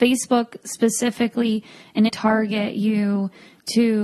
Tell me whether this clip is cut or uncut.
cut